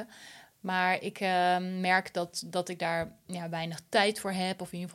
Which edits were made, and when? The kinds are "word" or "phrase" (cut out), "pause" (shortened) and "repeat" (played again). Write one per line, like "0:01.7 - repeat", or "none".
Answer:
none

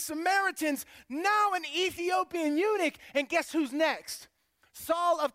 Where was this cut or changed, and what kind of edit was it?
none

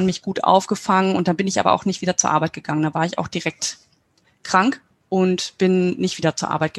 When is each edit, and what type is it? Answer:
0:04.9 - pause

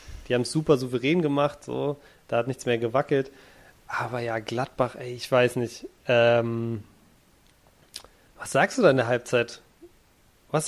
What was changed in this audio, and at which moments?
none

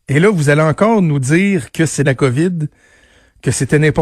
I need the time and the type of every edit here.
0:02.1 - phrase

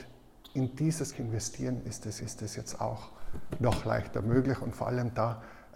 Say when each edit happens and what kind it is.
0:01.1 - phrase
0:02.2 - repeat

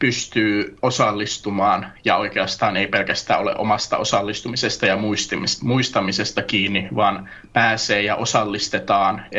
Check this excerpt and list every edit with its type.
none

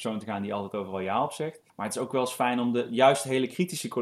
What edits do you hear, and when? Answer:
0:01.7 - pause

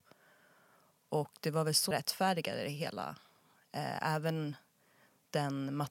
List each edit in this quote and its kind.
0:01.9 - word

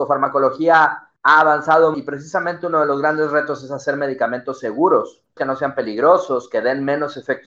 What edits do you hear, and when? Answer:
0:01.2 - pause
0:01.9 - word
0:05.4 - word

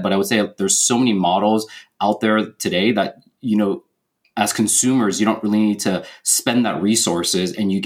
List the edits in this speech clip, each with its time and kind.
none

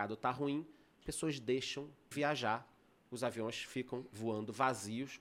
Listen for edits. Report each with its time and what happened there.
0:01.0 - word
0:02.1 - word

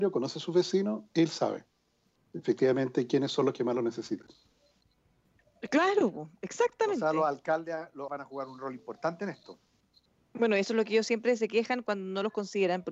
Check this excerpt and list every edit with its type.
0:08.1 - word

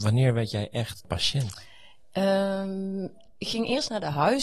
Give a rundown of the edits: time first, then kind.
none

